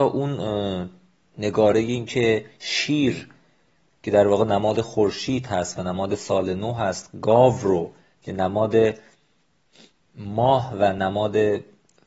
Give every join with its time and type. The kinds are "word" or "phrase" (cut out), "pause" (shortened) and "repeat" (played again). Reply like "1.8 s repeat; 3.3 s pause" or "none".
none